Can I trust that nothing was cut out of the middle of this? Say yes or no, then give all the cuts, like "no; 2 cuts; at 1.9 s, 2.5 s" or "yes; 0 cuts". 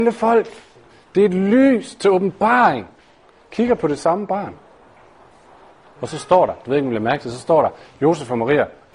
yes; 0 cuts